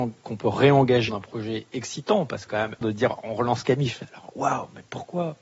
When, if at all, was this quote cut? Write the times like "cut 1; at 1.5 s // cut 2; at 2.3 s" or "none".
cut 1; at 1.1 s // cut 2; at 2.5 s // cut 3; at 2.8 s